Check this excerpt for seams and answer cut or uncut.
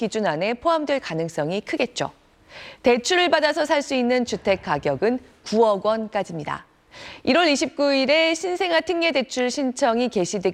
uncut